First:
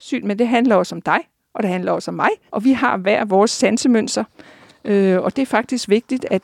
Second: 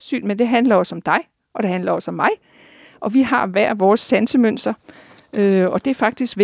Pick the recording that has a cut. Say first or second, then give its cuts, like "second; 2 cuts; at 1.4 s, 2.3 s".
first; 1 cut; at 2.5 s